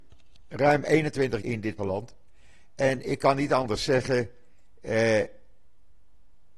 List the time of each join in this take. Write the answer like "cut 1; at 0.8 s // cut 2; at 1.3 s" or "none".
cut 1; at 1.4 s // cut 2; at 1.8 s